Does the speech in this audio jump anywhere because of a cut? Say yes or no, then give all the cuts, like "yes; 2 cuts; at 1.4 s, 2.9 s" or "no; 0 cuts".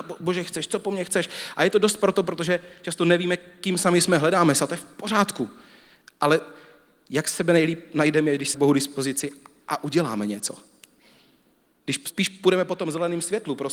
yes; 1 cut; at 8.5 s